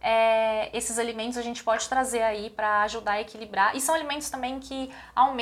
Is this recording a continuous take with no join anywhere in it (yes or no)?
yes